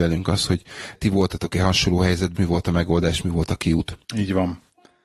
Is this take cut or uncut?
cut